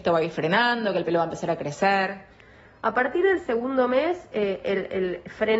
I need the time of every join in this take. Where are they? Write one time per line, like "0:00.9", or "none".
none